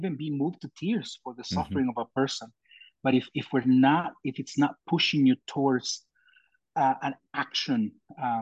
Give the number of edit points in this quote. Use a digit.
0